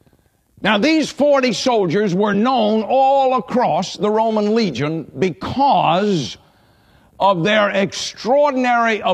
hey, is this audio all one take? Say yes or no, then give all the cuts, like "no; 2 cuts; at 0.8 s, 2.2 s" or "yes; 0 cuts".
yes; 0 cuts